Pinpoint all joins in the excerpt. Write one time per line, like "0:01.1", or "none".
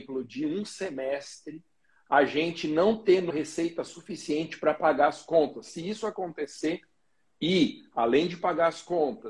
0:03.3